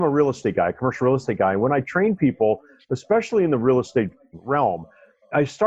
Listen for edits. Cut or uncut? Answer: uncut